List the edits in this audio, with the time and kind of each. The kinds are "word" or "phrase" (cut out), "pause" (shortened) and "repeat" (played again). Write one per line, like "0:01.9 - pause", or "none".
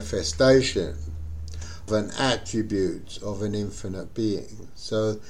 0:01.9 - word